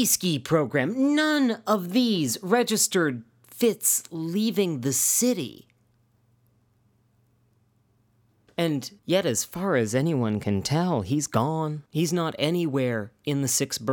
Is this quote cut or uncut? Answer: cut